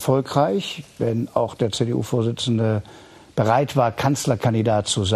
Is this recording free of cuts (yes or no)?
yes